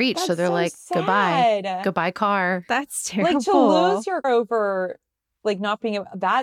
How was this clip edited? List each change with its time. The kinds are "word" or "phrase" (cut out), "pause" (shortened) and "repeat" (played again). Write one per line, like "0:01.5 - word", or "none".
0:04.2 - word